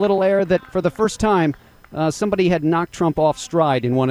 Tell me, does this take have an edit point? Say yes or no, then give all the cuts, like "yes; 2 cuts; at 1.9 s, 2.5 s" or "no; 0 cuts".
no; 0 cuts